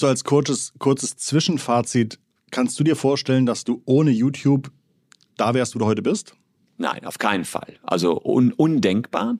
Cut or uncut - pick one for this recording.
uncut